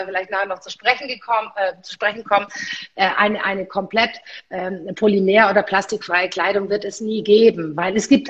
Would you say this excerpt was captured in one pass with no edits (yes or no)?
yes